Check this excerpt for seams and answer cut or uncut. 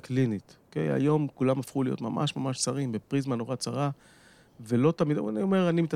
uncut